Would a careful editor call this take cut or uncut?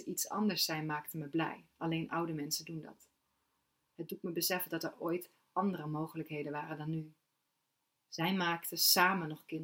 uncut